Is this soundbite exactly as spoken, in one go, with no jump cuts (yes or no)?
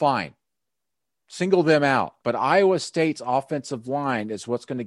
no